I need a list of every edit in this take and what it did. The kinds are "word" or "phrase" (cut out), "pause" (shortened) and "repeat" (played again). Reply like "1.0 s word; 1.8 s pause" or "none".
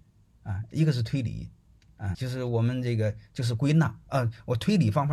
2.1 s word